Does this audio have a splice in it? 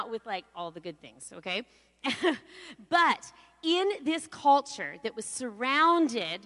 no; 0 cuts

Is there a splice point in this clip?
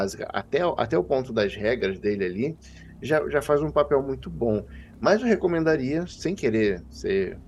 no; 0 cuts

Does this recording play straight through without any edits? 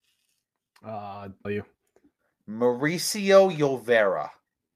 no; 1 cut; at 1.4 s

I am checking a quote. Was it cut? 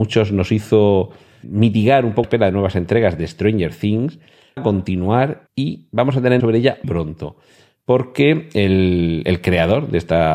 yes; 6 cuts; at 1.4 s, 2.2 s, 4.6 s, 5.5 s, 6.4 s, 6.8 s

